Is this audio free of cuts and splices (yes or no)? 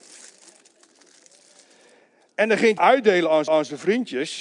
no